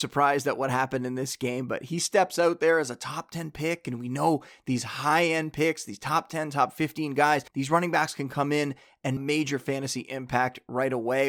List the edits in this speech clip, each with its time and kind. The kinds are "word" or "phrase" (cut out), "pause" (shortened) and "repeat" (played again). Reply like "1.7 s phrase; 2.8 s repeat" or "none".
7.5 s pause; 9.2 s phrase